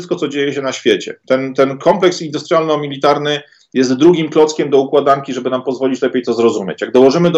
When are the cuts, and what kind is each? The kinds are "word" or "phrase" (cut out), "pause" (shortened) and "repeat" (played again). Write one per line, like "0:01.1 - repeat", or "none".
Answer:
none

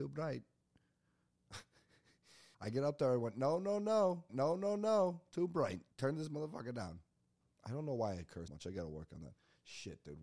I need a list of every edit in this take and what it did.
0:02.5 - pause
0:04.3 - repeat
0:05.9 - pause
0:07.4 - pause
0:08.5 - word

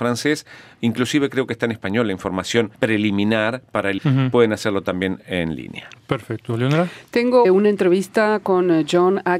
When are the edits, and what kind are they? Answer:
0:02.7 - pause
0:04.0 - word
0:07.4 - phrase

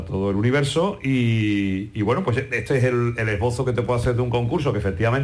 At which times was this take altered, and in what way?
none

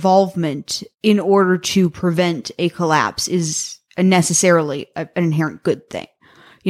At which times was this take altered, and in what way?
0:00.9 - pause
0:03.9 - pause

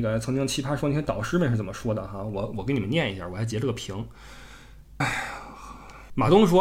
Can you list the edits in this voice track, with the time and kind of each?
0:05.0 - word

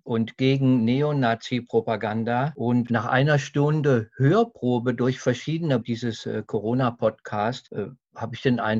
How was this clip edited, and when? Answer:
0:05.8 - word

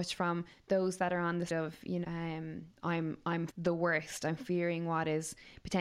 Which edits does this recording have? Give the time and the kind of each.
0:01.5 - word
0:02.0 - word
0:03.5 - word

